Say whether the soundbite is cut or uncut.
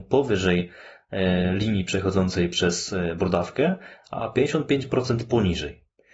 uncut